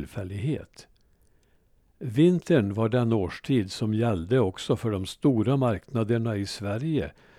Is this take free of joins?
yes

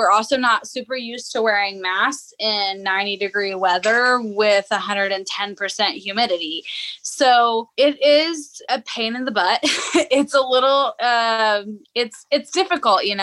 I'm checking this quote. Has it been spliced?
no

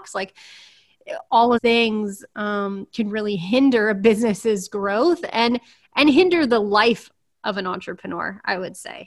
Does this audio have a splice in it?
yes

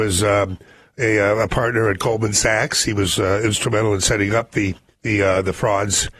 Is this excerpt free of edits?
no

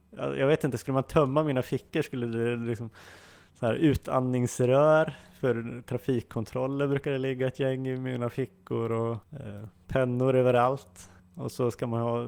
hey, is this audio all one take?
no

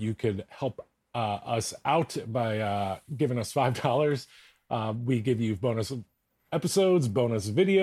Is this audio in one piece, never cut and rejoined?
yes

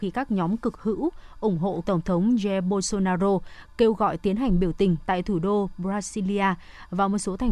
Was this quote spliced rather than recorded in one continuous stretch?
yes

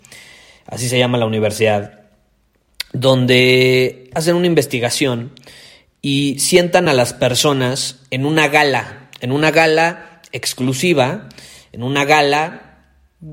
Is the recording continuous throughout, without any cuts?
yes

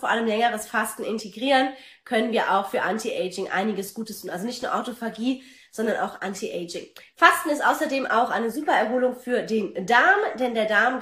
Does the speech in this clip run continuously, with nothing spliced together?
yes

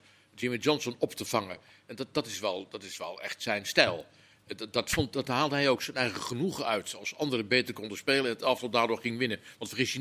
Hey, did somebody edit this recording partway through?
no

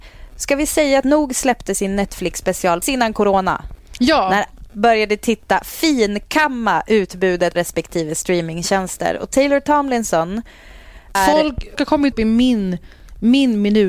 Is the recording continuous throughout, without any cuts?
no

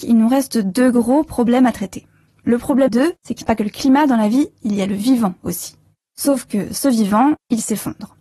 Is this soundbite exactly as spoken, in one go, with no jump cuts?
no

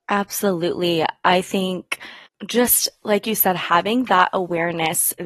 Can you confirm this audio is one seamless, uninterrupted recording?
no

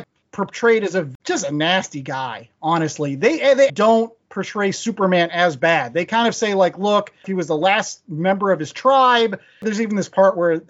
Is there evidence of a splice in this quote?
yes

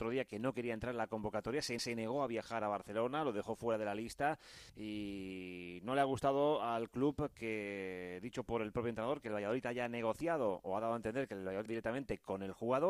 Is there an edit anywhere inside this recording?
yes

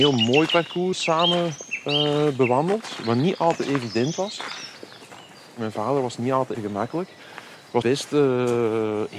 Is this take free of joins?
no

